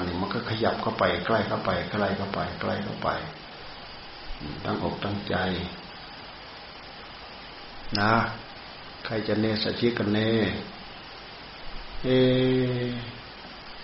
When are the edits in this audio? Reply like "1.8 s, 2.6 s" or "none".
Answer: none